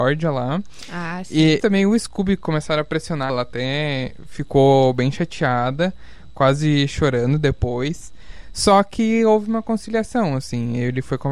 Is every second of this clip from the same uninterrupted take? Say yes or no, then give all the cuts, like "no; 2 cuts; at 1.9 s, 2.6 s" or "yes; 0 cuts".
no; 2 cuts; at 1.6 s, 3.3 s